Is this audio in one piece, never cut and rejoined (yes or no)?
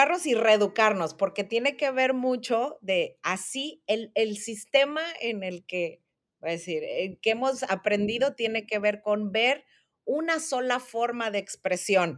yes